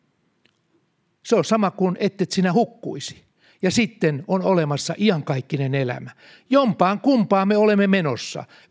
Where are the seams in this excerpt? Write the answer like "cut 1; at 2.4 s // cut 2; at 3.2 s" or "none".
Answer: none

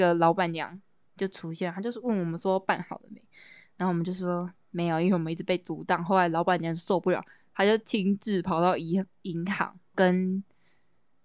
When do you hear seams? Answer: none

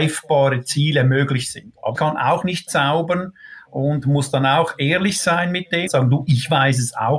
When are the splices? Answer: cut 1; at 1.9 s // cut 2; at 5.9 s

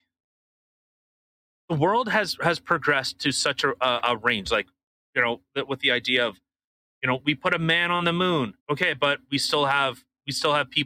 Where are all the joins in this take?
cut 1; at 8.6 s

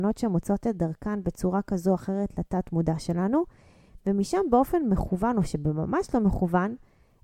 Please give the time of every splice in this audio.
none

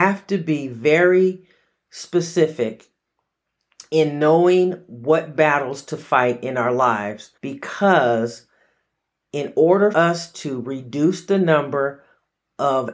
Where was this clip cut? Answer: cut 1; at 7.4 s // cut 2; at 9.9 s

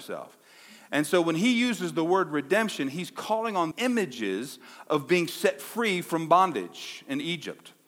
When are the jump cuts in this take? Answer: cut 1; at 3.7 s

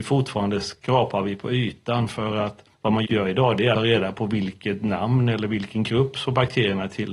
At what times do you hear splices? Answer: cut 1; at 2.7 s // cut 2; at 3.0 s // cut 3; at 3.7 s

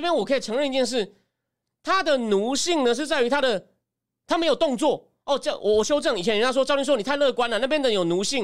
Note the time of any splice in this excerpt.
none

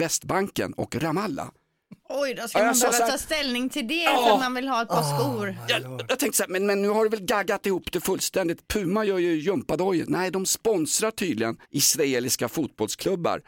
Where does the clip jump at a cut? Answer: cut 1; at 2.0 s // cut 2; at 11.6 s

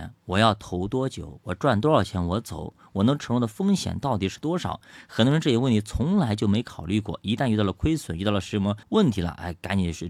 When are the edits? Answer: cut 1; at 8.8 s

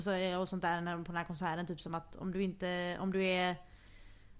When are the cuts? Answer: none

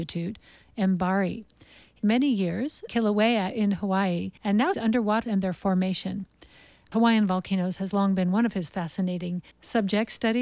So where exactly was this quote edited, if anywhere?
cut 1; at 2.0 s // cut 2; at 2.9 s // cut 3; at 4.4 s // cut 4; at 4.7 s // cut 5; at 5.2 s // cut 6; at 6.9 s // cut 7; at 9.5 s

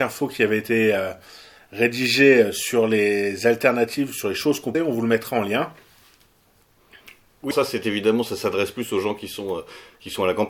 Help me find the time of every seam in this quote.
cut 1; at 4.7 s // cut 2; at 7.5 s

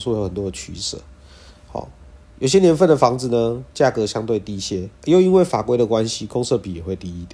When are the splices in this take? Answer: cut 1; at 4.9 s

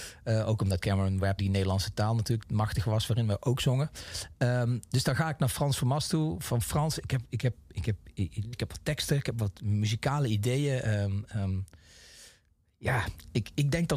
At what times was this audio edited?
cut 1; at 1.4 s // cut 2; at 2.4 s // cut 3; at 8.5 s

